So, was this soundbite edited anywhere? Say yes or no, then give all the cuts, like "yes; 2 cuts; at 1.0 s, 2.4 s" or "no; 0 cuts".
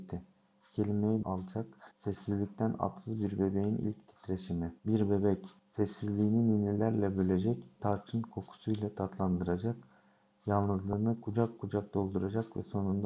yes; 5 cuts; at 1.2 s, 1.9 s, 4.8 s, 5.6 s, 7.8 s